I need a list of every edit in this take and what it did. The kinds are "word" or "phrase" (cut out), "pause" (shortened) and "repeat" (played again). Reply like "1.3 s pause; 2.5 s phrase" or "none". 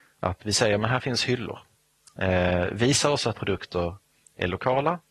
3.3 s word

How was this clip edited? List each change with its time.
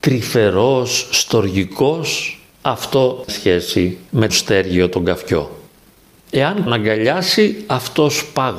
3.3 s phrase; 4.3 s word; 6.7 s phrase

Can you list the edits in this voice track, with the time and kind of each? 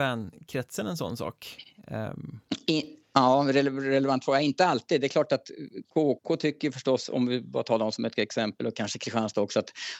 3.0 s pause; 5.8 s pause

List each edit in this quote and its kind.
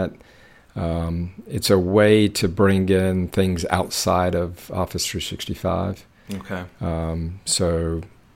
none

